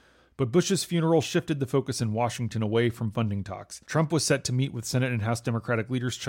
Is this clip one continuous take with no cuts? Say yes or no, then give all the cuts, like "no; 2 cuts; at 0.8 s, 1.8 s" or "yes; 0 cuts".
no; 1 cut; at 3.8 s